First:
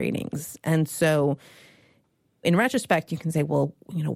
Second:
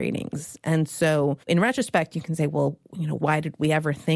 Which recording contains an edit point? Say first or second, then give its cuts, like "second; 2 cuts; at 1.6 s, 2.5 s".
second; 1 cut; at 1.4 s